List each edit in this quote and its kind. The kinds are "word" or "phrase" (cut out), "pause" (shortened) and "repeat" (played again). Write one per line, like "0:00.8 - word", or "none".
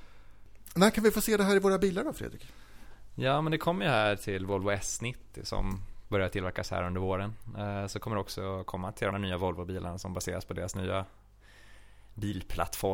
0:09.1 - word